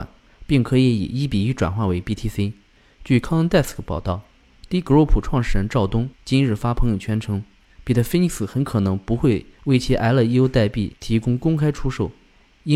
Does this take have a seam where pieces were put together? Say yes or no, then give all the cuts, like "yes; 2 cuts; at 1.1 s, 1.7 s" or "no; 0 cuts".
yes; 3 cuts; at 2.8 s, 6.1 s, 9.5 s